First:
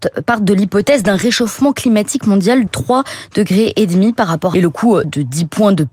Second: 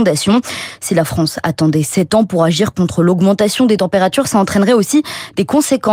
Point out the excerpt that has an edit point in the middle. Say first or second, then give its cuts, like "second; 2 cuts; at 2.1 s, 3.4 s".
first; 3 cuts; at 2.7 s, 4.5 s, 5.0 s